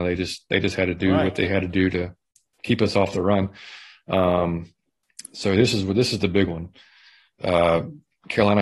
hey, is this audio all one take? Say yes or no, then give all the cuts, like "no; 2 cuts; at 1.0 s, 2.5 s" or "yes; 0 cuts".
yes; 0 cuts